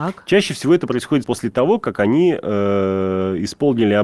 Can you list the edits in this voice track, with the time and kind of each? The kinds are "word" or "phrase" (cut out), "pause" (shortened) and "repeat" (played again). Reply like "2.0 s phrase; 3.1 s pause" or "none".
1.2 s word